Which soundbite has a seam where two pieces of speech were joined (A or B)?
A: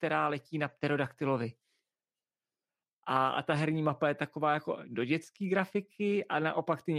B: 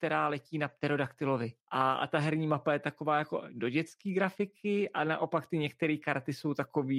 B